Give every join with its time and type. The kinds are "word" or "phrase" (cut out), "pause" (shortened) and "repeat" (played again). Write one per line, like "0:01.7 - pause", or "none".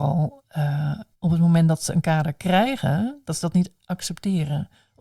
0:01.1 - pause